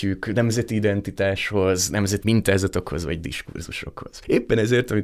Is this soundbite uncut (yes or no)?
no